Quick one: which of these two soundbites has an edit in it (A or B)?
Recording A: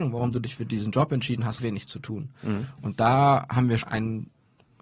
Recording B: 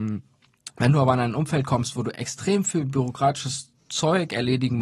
A